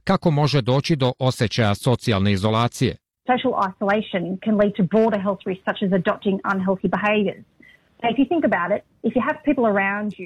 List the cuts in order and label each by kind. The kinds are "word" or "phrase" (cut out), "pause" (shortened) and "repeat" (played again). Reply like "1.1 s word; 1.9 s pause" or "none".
none